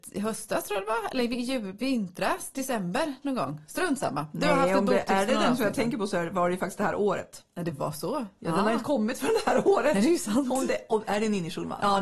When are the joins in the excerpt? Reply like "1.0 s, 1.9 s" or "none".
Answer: none